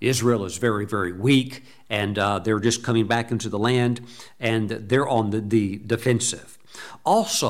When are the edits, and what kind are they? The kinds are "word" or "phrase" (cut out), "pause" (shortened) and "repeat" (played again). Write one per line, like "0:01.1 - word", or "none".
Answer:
none